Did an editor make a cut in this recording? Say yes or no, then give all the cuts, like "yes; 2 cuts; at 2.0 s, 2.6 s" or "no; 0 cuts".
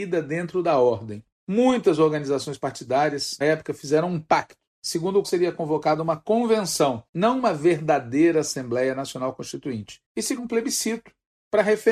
yes; 5 cuts; at 3.4 s, 5.2 s, 7.1 s, 10.0 s, 10.4 s